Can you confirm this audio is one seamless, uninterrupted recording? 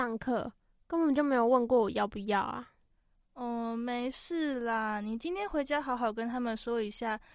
yes; 0 cuts

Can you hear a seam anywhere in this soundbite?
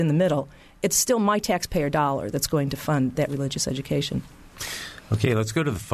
no; 0 cuts

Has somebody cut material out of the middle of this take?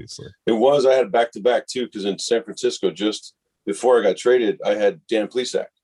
no; 0 cuts

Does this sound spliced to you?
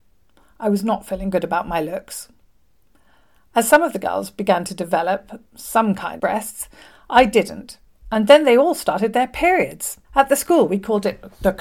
yes; 2 cuts; at 6.2 s, 10.0 s

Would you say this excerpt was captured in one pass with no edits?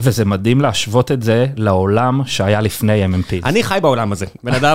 yes; 0 cuts

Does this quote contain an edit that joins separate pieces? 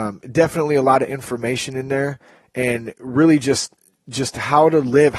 no; 0 cuts

